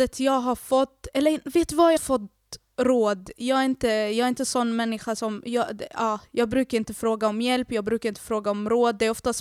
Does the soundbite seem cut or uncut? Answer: cut